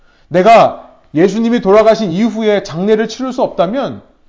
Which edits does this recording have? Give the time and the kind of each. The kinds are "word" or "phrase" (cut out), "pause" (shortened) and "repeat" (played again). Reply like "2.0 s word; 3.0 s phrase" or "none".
none